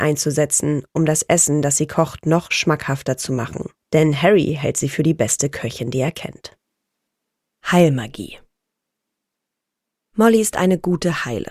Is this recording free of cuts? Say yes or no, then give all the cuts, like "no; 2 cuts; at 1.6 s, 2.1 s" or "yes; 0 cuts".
no; 2 cuts; at 3.8 s, 7.1 s